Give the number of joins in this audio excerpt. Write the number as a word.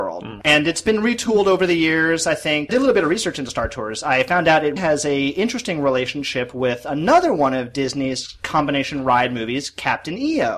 two